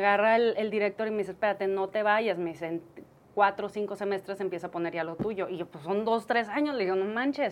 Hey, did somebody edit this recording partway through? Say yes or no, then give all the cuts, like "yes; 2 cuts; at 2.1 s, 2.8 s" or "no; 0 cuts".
no; 0 cuts